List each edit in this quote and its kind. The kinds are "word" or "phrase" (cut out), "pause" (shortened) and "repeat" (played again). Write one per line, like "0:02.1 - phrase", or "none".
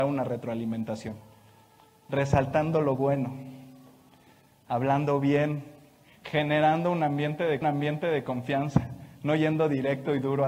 0:07.6 - repeat